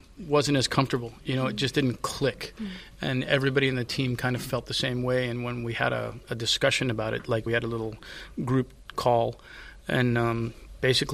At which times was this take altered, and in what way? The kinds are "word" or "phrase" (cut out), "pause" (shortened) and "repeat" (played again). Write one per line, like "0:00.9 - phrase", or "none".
0:07.5 - phrase